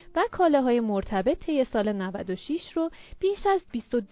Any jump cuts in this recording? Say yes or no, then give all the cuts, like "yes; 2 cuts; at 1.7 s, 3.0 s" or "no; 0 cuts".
no; 0 cuts